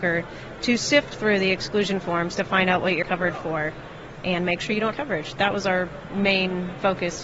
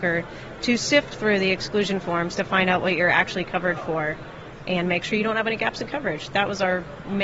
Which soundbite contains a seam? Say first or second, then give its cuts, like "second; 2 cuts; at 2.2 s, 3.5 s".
first; 2 cuts; at 3.0 s, 4.9 s